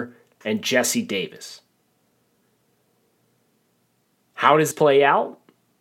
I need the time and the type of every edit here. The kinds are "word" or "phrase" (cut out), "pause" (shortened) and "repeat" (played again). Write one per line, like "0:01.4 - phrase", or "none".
0:04.7 - word